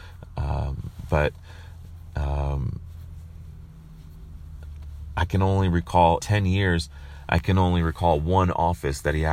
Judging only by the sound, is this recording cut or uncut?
cut